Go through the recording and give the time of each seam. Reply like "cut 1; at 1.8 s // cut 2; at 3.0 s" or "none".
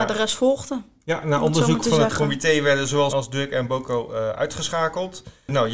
cut 1; at 3.1 s